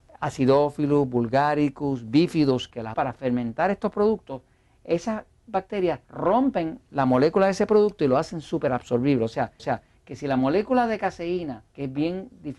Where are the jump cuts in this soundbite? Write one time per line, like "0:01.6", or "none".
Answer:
0:02.9
0:06.0
0:09.6
0:11.7